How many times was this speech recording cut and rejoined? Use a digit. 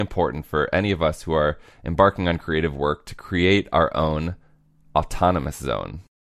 0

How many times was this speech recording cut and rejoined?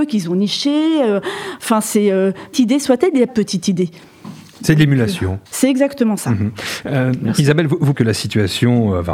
4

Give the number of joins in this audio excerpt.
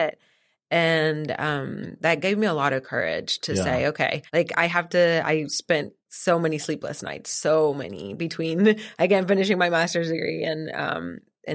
2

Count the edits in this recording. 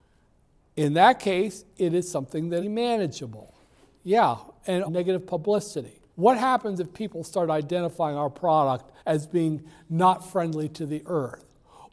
4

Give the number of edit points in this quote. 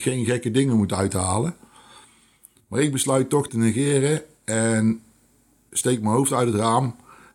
1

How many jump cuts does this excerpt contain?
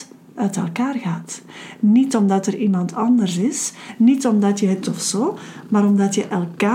1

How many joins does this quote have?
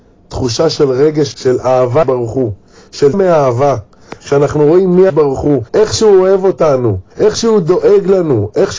6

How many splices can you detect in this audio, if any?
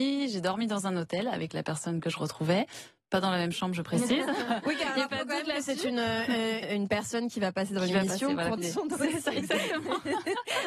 3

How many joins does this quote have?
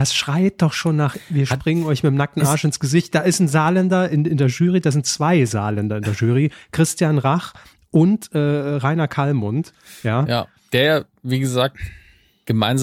0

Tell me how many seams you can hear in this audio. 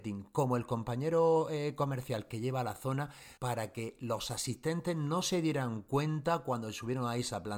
1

